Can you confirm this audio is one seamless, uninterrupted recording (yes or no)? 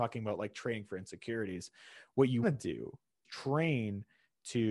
no